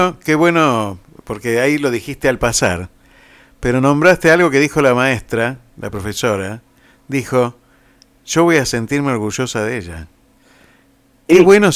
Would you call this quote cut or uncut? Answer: uncut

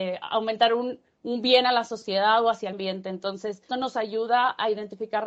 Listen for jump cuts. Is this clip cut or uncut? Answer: cut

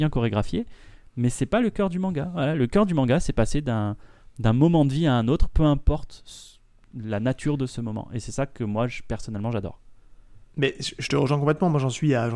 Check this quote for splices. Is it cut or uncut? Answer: cut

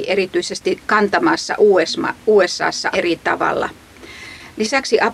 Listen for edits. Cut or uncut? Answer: cut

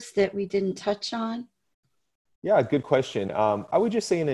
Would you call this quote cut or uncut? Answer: uncut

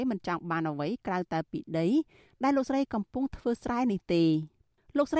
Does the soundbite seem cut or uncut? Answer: uncut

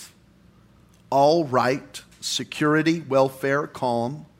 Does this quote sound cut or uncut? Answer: uncut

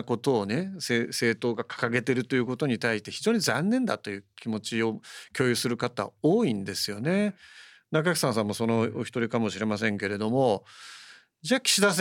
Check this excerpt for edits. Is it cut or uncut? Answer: uncut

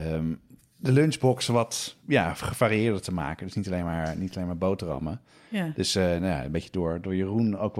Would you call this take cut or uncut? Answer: uncut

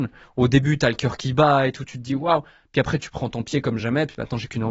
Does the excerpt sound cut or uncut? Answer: uncut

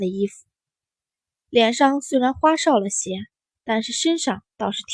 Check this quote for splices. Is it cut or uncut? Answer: uncut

